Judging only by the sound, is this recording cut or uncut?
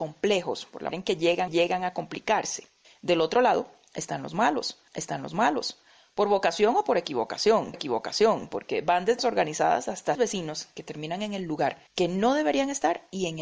cut